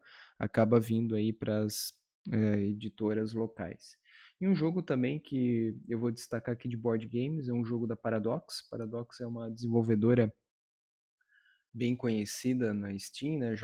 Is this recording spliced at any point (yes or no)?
no